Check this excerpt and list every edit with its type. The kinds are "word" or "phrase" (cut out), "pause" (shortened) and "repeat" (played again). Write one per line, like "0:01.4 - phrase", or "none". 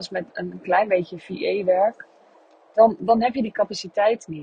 none